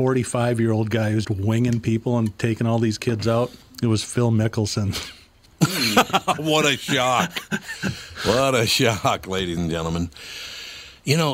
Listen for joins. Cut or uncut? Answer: cut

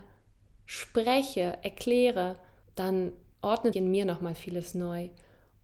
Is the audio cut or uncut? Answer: cut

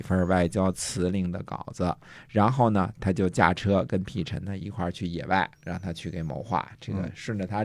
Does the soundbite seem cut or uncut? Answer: cut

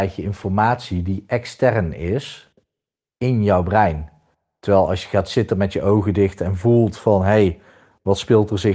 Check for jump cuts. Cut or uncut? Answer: uncut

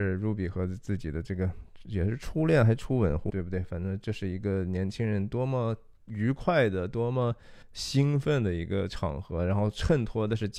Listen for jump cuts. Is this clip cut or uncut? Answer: cut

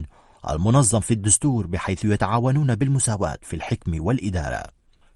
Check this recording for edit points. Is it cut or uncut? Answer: uncut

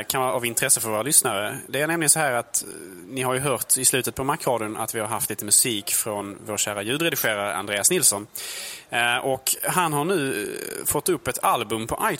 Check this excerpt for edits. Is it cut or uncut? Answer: uncut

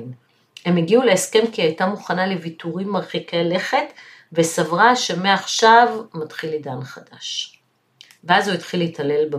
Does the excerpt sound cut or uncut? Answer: uncut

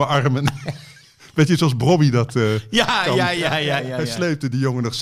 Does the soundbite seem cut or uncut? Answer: cut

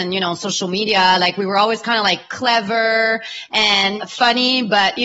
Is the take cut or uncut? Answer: uncut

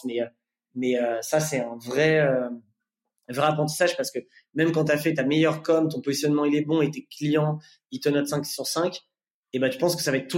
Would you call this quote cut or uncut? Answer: uncut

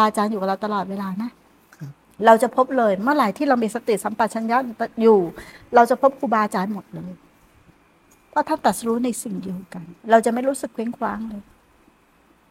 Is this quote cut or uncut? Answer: cut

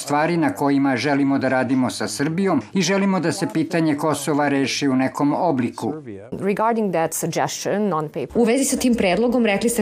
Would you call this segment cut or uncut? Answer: uncut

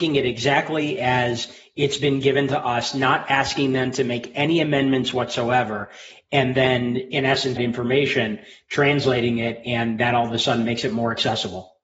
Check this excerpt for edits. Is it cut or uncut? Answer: cut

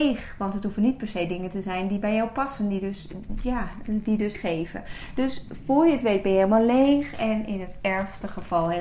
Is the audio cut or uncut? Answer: cut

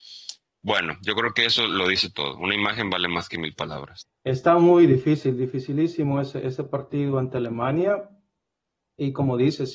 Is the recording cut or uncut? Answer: uncut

